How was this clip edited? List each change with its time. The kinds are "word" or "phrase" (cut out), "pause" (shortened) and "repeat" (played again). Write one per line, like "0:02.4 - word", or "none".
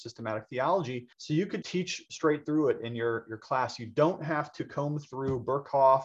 0:01.1 - pause
0:01.6 - word

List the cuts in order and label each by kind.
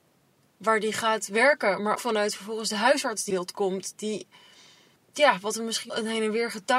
0:01.9 - word
0:03.3 - word
0:05.9 - word

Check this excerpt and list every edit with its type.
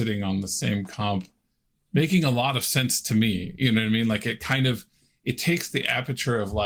none

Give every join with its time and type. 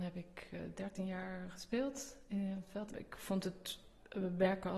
none

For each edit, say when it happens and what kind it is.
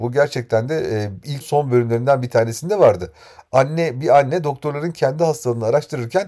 0:01.4 - word

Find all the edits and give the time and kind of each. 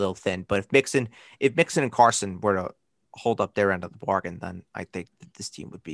none

